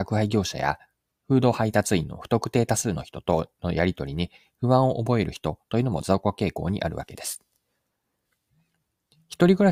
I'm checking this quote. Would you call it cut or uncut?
uncut